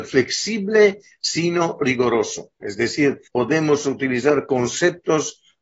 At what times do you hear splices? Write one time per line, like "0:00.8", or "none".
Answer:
0:03.3